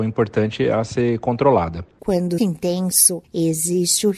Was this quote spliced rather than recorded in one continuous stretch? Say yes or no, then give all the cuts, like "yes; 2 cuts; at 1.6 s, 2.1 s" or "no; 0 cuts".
yes; 1 cut; at 2.4 s